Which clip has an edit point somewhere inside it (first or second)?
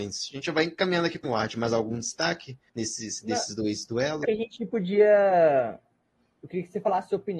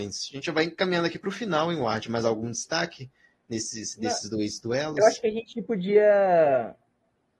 first